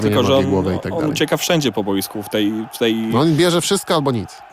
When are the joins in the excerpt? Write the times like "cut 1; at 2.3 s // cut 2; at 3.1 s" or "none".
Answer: none